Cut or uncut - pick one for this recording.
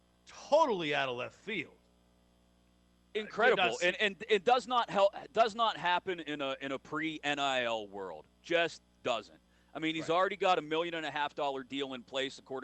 uncut